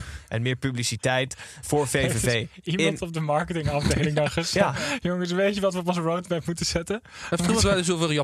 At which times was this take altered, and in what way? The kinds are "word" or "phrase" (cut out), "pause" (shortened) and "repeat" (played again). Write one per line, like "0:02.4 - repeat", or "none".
0:01.6 - word